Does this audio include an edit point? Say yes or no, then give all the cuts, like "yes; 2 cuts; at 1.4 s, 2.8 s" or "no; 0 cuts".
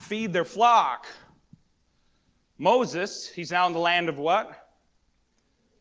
no; 0 cuts